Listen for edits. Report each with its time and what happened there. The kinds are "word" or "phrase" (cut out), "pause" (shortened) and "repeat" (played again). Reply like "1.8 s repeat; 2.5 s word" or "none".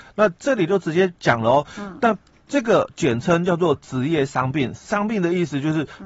none